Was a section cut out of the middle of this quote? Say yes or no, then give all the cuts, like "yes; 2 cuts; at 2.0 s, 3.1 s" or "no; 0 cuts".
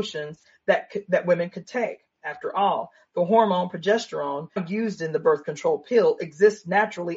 yes; 1 cut; at 4.6 s